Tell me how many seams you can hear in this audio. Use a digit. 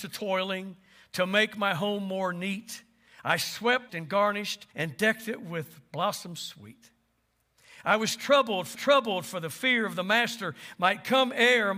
3